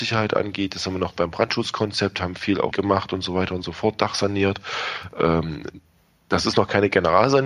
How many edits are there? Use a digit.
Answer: 1